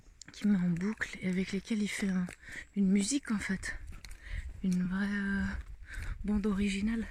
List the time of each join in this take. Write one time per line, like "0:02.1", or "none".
none